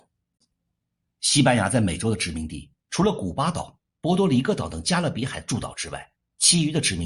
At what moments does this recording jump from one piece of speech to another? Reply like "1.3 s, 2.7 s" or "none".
6.2 s